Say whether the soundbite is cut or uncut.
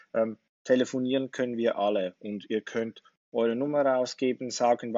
uncut